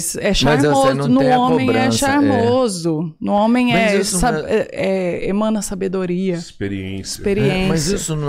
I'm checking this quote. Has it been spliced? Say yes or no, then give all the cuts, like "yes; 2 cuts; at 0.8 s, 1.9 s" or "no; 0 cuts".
no; 0 cuts